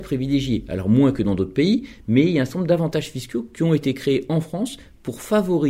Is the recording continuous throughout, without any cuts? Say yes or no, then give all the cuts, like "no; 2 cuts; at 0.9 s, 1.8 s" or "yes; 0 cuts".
yes; 0 cuts